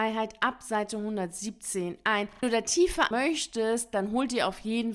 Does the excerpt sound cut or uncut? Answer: cut